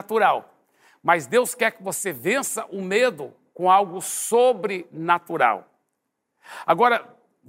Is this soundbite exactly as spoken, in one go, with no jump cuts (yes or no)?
yes